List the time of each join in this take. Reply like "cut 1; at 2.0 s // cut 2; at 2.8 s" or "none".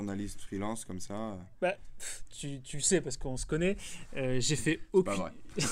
cut 1; at 2.3 s